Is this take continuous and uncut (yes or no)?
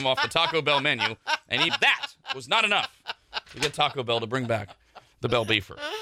no